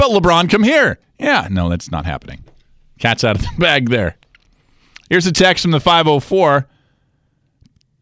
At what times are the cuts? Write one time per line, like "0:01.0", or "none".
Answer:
none